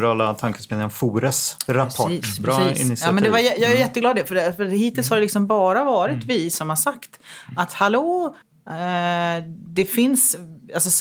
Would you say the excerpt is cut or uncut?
cut